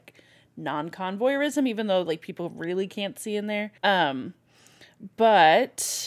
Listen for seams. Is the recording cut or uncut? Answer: cut